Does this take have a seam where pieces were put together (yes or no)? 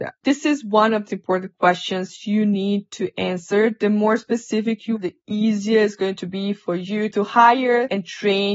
yes